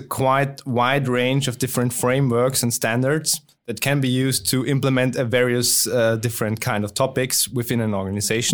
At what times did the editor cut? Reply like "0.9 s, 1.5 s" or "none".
none